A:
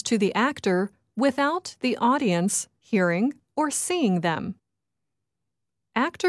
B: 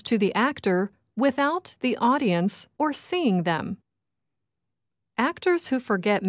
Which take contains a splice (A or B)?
B